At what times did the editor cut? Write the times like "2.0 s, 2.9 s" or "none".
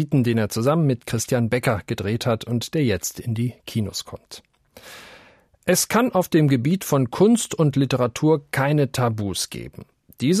none